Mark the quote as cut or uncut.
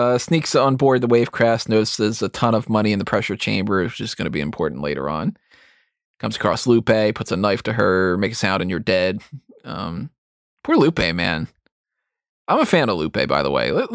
uncut